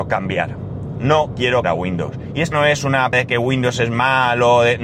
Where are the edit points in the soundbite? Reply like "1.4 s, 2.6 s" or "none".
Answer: 1.6 s, 2.5 s, 3.1 s